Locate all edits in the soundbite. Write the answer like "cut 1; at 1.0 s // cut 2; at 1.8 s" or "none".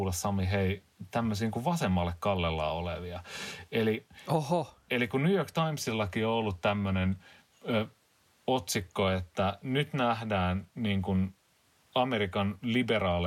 none